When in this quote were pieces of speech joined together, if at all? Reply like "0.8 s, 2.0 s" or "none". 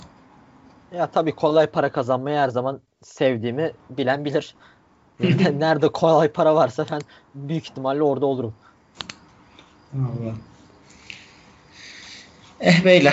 none